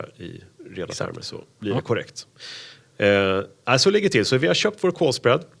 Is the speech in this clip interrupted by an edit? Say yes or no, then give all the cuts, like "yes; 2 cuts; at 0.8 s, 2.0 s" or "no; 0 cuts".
no; 0 cuts